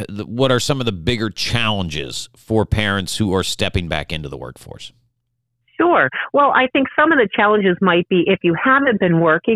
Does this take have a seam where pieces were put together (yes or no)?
no